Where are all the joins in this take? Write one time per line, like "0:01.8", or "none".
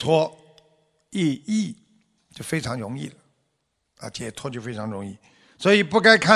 none